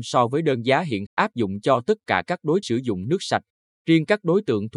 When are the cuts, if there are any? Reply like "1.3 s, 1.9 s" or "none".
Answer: 1.1 s, 2.6 s